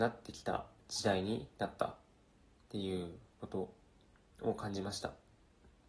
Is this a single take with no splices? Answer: yes; 0 cuts

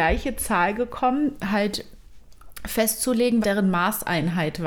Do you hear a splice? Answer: yes; 2 cuts; at 1.4 s, 3.4 s

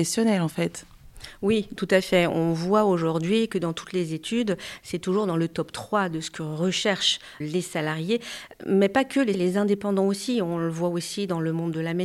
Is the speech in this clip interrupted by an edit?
yes; 2 cuts; at 7.4 s, 9.3 s

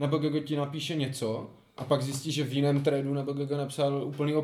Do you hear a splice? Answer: no; 0 cuts

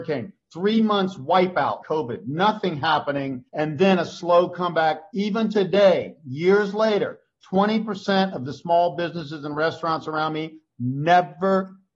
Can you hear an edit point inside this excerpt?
yes; 2 cuts; at 1.8 s, 3.5 s

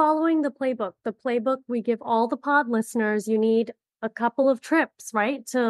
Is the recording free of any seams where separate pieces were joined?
yes; 0 cuts

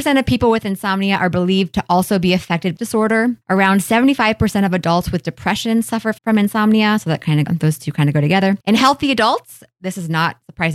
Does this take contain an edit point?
yes; 5 cuts; at 2.8 s, 3.4 s, 6.2 s, 7.5 s, 8.6 s

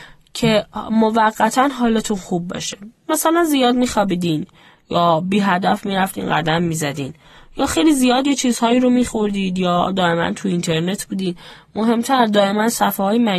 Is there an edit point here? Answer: no; 0 cuts

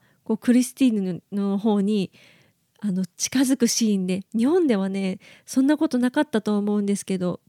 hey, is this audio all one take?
no; 1 cut; at 4.3 s

